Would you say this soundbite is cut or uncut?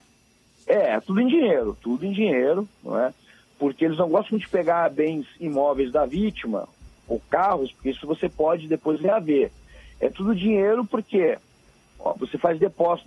uncut